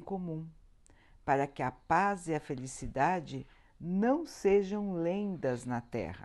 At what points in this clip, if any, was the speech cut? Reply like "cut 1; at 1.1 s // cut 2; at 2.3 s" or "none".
none